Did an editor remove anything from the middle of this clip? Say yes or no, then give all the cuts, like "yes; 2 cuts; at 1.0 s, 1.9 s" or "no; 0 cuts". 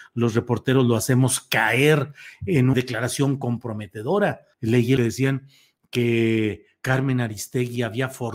yes; 3 cuts; at 2.7 s, 4.5 s, 5.0 s